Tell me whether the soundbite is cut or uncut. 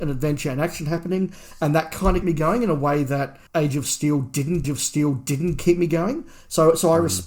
cut